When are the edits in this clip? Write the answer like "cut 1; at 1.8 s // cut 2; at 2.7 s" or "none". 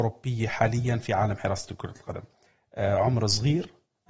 cut 1; at 2.5 s